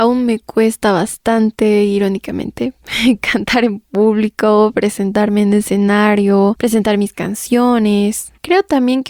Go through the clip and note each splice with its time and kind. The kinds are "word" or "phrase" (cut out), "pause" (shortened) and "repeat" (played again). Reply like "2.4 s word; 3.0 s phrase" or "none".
none